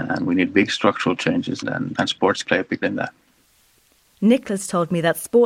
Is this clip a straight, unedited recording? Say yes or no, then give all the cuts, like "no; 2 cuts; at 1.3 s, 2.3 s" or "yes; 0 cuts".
no; 4 cuts; at 1.6 s, 1.9 s, 2.4 s, 2.8 s